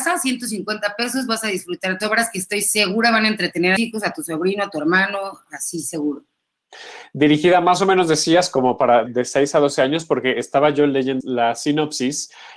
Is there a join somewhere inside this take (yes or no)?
yes